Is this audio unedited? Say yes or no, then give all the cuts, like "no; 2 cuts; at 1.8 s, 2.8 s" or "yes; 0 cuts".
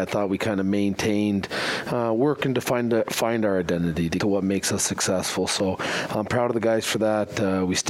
no; 1 cut; at 4.2 s